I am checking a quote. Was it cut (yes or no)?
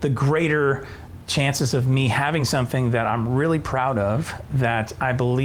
no